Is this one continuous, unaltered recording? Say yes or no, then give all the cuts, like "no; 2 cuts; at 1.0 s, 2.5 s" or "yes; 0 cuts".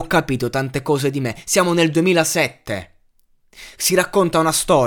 yes; 0 cuts